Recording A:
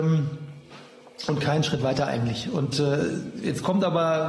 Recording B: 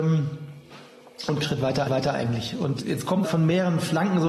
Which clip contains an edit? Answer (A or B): B